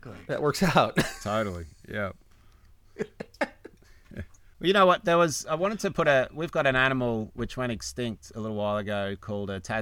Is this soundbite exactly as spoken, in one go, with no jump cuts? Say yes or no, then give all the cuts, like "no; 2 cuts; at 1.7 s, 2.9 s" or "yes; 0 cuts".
yes; 0 cuts